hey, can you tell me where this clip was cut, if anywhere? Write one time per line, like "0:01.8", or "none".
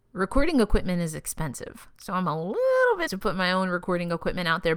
0:03.1